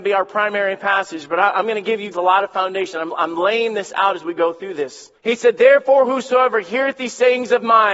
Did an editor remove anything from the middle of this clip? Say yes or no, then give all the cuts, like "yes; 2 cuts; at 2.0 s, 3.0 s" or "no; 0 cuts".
yes; 3 cuts; at 2.1 s, 3.1 s, 5.2 s